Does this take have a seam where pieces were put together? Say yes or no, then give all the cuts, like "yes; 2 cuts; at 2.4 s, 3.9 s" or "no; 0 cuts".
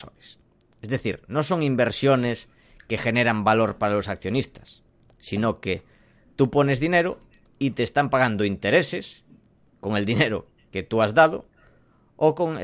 no; 0 cuts